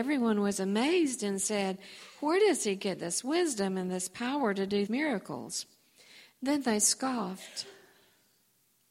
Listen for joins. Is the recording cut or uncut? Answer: cut